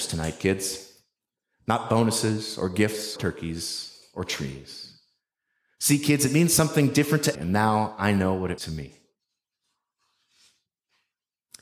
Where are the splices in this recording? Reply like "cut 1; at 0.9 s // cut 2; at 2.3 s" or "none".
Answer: cut 1; at 3.2 s // cut 2; at 7.3 s // cut 3; at 8.6 s

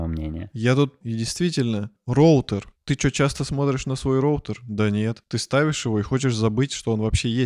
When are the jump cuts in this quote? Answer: cut 1; at 1.0 s

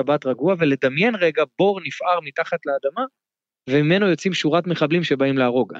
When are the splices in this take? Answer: none

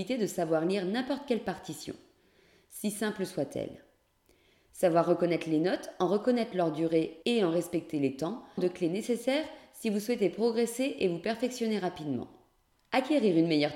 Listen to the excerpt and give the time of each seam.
cut 1; at 7.2 s // cut 2; at 8.6 s

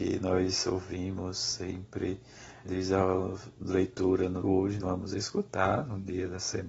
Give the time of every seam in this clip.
cut 1; at 2.6 s // cut 2; at 4.4 s // cut 3; at 4.8 s

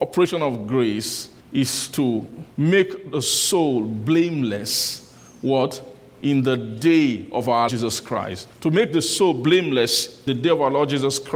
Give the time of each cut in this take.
cut 1; at 1.4 s // cut 2; at 2.5 s // cut 3; at 7.7 s // cut 4; at 8.5 s // cut 5; at 10.3 s

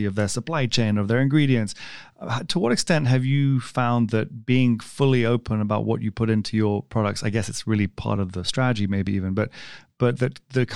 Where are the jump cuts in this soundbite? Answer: none

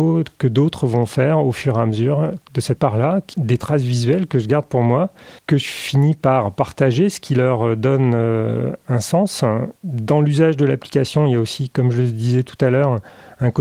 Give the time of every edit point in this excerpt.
cut 1; at 2.4 s // cut 2; at 2.8 s // cut 3; at 3.3 s // cut 4; at 5.4 s

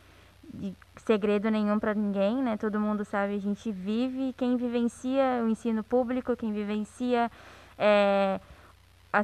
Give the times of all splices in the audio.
none

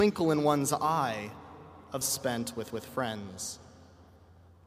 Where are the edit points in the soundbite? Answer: cut 1; at 2.0 s // cut 2; at 2.7 s

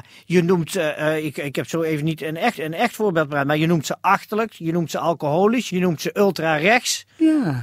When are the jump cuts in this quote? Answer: cut 1; at 2.5 s

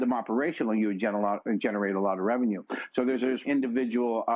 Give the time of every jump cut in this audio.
cut 1; at 3.4 s

